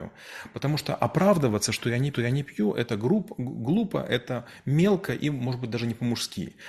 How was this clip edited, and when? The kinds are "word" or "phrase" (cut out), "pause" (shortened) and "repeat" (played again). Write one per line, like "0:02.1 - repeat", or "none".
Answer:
0:02.1 - repeat